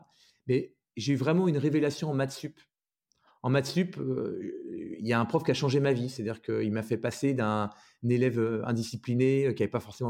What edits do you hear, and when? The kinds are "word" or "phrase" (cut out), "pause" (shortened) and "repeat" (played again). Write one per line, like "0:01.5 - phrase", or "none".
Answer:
none